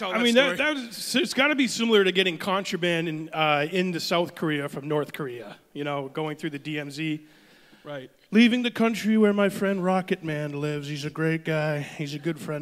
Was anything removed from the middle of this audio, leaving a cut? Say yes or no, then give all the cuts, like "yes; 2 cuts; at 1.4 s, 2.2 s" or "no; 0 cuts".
no; 0 cuts